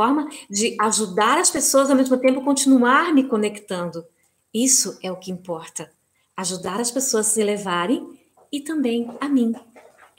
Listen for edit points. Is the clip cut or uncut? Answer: uncut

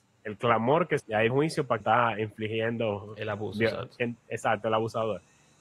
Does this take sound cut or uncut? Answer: cut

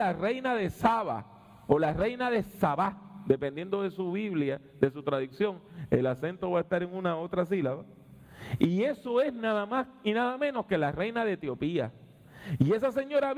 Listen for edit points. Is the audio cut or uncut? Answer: uncut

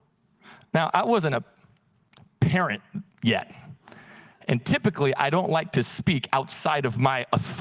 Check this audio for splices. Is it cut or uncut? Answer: uncut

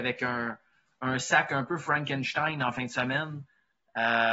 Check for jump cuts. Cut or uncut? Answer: uncut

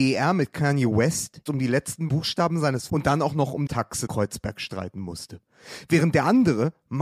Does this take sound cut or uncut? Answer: cut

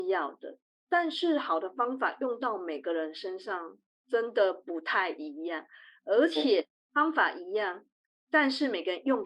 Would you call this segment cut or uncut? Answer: uncut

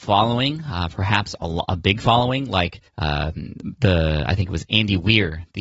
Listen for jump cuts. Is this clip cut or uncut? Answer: cut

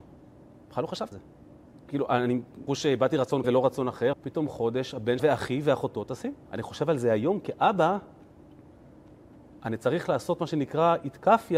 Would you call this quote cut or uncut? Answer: cut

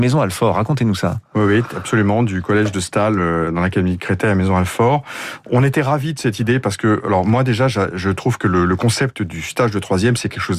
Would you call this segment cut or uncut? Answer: uncut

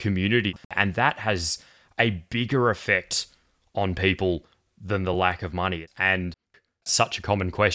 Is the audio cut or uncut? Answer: uncut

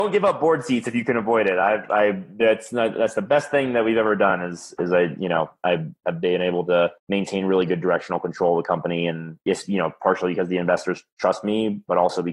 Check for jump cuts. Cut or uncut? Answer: cut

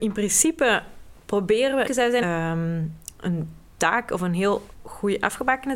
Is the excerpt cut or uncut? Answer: cut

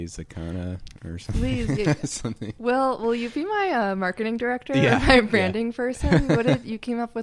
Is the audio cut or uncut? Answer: uncut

